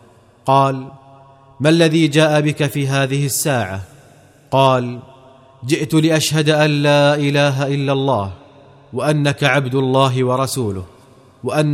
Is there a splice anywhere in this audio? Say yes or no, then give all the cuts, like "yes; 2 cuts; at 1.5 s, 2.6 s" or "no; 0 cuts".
no; 0 cuts